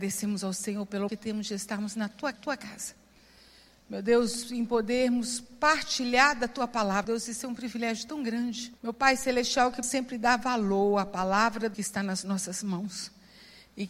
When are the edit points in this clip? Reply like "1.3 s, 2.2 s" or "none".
1.1 s, 2.3 s, 7.0 s, 8.8 s, 9.8 s, 11.7 s